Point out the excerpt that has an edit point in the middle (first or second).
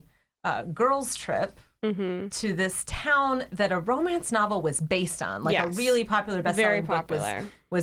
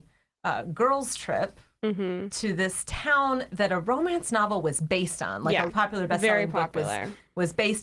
second